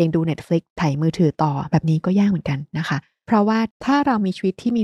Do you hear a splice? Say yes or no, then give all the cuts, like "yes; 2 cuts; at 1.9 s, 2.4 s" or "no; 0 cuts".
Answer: no; 0 cuts